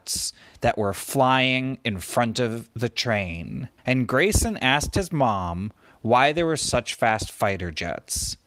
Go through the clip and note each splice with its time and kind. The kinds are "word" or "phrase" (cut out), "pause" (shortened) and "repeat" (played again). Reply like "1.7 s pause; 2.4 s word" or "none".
3.8 s pause